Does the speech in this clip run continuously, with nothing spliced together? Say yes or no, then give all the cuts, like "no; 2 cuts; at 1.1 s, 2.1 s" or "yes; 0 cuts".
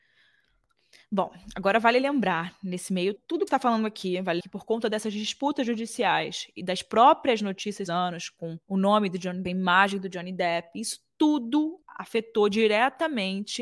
no; 7 cuts; at 3.2 s, 3.5 s, 4.4 s, 7.9 s, 8.6 s, 9.4 s, 11.8 s